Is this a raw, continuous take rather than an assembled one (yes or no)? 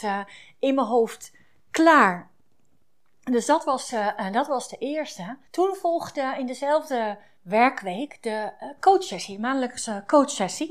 no